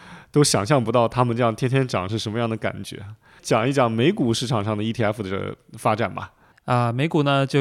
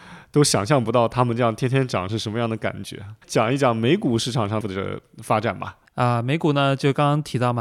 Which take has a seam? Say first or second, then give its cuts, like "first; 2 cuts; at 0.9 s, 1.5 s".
second; 3 cuts; at 3.2 s, 4.6 s, 5.9 s